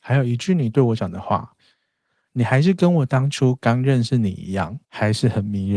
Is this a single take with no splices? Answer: no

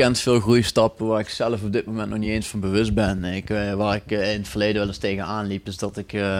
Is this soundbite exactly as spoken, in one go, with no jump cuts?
yes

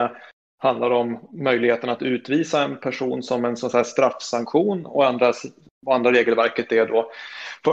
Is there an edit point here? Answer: no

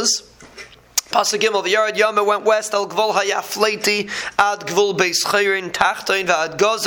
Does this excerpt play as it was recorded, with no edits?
yes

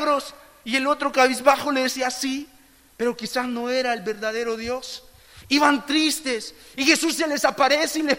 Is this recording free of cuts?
yes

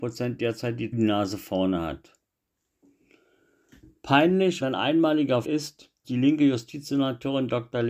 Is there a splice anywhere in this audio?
yes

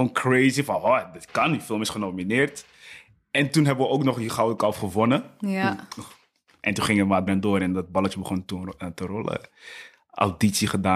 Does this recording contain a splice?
yes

